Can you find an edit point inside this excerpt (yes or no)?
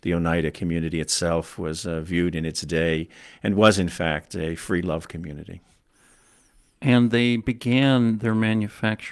no